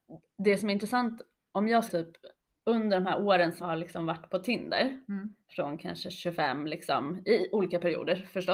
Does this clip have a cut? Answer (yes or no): yes